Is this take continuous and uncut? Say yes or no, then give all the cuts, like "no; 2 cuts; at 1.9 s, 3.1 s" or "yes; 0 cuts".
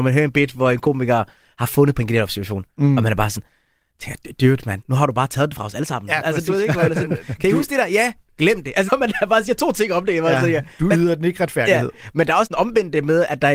no; 1 cut; at 8.9 s